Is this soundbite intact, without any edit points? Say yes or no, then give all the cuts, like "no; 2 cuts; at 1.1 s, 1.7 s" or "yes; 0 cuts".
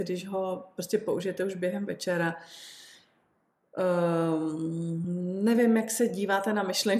yes; 0 cuts